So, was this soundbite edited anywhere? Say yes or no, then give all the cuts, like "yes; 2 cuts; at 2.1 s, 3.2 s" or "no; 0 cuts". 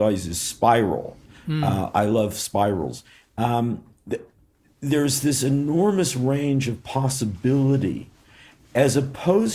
no; 0 cuts